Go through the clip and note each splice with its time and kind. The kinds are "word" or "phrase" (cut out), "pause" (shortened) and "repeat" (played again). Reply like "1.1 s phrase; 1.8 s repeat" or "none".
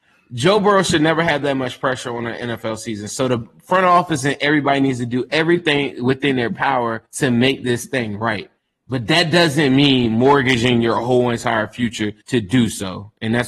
7.1 s pause; 8.6 s pause; 12.2 s pause